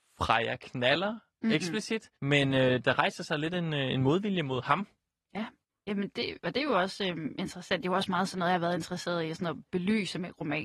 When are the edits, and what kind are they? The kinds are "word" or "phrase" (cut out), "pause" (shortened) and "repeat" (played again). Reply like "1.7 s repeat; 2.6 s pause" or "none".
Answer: 2.1 s pause; 5.6 s pause